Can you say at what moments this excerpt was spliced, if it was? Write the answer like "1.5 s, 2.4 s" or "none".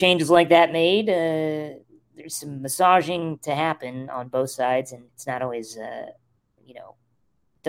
5.1 s